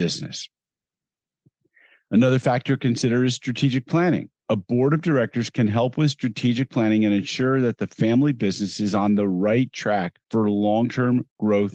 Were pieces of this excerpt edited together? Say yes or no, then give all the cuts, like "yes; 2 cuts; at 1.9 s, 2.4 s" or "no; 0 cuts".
yes; 2 cuts; at 4.4 s, 10.2 s